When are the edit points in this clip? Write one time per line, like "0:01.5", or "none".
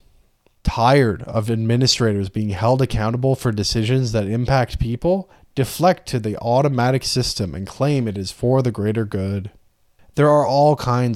none